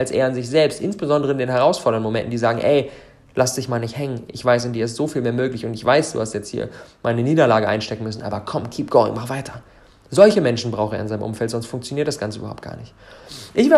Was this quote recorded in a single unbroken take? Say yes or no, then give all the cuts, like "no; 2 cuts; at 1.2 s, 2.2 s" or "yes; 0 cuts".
yes; 0 cuts